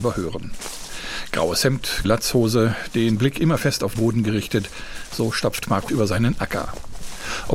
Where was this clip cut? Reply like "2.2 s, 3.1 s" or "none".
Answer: 2.0 s, 4.0 s, 5.9 s